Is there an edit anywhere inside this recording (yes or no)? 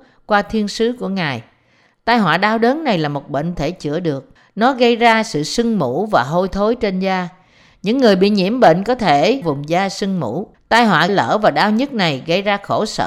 yes